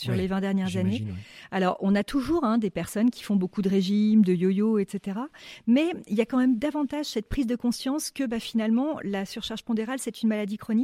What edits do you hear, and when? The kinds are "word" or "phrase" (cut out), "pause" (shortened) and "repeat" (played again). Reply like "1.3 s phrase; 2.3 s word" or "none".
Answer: none

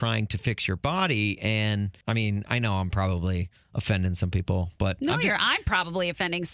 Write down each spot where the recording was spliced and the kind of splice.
2.0 s pause

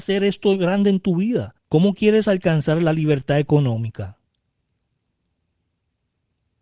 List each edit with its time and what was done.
1.6 s pause

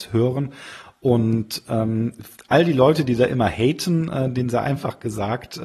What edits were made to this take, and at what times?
none

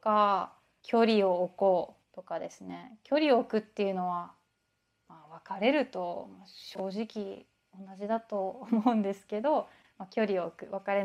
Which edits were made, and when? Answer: 2.0 s pause

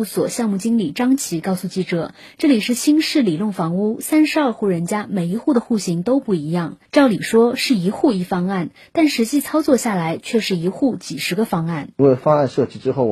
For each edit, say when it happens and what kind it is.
6.9 s pause; 11.9 s pause

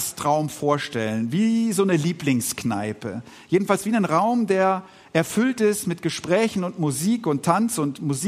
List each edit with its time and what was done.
none

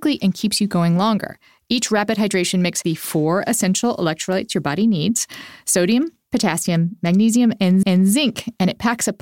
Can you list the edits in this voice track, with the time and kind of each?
2.8 s word; 7.8 s repeat

